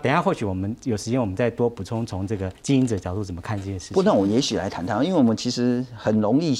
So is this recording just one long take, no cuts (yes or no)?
no